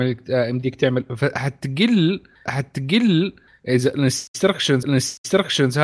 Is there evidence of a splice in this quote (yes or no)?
yes